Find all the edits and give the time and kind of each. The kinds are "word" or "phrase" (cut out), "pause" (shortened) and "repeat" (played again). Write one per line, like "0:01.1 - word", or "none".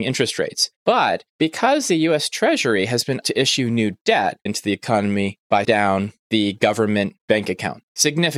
0:03.2 - word
0:04.5 - phrase
0:05.6 - word